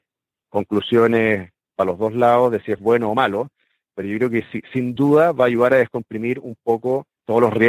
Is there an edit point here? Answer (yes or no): no